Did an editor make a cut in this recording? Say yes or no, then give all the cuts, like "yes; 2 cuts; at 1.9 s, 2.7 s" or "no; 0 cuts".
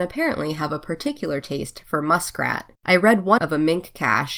yes; 2 cuts; at 2.7 s, 3.4 s